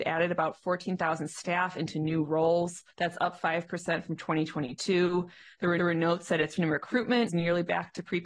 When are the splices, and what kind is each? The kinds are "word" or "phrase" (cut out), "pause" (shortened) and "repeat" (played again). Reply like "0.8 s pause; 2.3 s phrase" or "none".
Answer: 2.9 s pause; 5.8 s repeat; 6.6 s word; 7.3 s word